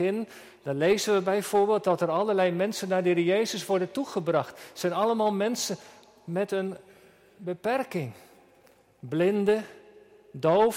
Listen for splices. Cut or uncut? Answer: uncut